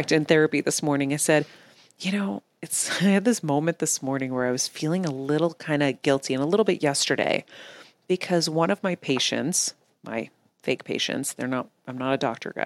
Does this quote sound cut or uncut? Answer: uncut